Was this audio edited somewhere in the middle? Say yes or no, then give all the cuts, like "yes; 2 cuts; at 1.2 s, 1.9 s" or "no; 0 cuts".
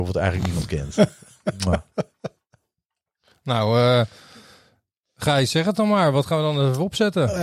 no; 0 cuts